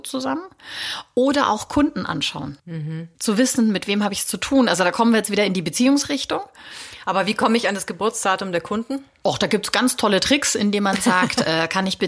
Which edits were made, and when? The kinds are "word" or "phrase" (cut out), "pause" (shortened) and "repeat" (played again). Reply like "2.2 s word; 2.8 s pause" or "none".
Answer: none

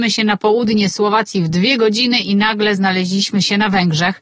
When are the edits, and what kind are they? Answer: none

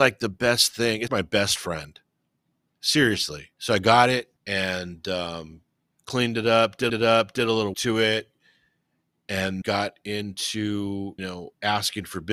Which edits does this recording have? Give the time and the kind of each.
1.1 s word; 3.5 s pause; 4.4 s pause; 5.9 s pause; 6.9 s repeat; 7.7 s word; 9.6 s word; 11.2 s word

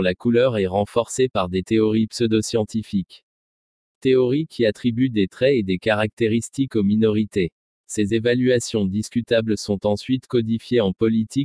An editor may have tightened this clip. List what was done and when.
none

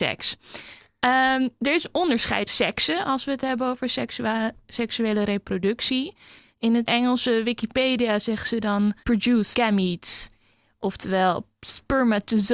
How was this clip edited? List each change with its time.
2.5 s word; 6.9 s word; 9.0 s word; 9.5 s word

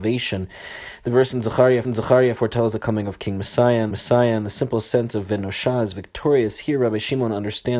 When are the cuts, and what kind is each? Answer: 1.8 s repeat; 3.9 s repeat

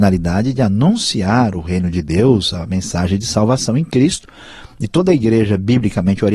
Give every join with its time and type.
none

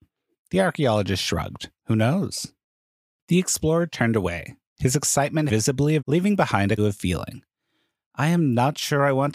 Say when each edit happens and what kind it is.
1.8 s pause; 5.5 s word; 6.0 s word; 6.8 s phrase

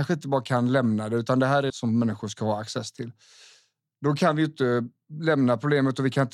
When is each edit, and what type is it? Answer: 1.7 s phrase

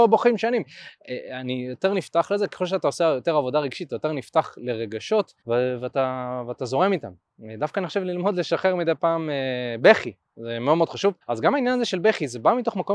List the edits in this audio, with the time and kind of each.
5.4 s pause; 11.2 s pause

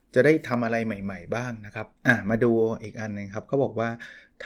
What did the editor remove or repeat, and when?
2.0 s pause

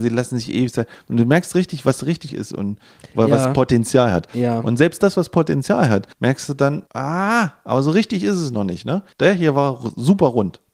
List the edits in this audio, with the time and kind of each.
2.3 s word; 6.1 s pause; 6.9 s pause; 9.1 s pause

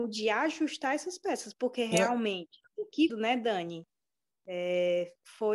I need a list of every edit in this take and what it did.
2.7 s pause; 3.1 s phrase

